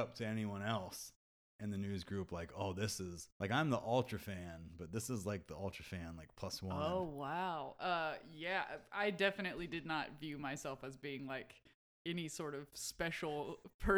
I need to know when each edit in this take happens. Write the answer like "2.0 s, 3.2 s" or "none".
3.3 s, 11.8 s